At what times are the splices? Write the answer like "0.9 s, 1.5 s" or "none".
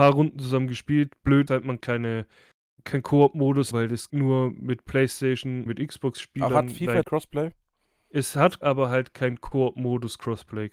1.5 s, 1.8 s, 2.7 s, 3.7 s, 4.1 s, 5.7 s, 7.0 s, 8.6 s